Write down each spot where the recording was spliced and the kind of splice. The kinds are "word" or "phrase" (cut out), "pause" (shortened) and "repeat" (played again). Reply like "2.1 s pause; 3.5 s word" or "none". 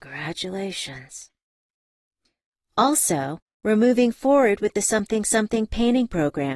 none